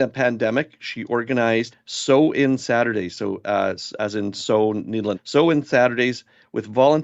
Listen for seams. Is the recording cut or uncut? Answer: cut